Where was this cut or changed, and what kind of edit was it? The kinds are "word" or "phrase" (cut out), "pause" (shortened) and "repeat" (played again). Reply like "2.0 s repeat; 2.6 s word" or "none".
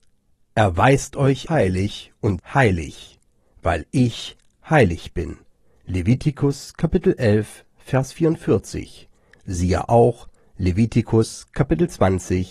1.5 s word; 2.4 s word